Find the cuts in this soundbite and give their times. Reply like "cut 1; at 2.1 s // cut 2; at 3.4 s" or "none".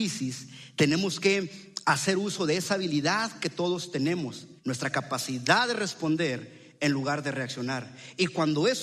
cut 1; at 4.6 s